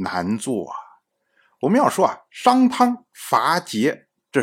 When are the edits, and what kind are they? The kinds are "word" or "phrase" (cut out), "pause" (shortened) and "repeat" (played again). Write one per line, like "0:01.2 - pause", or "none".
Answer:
none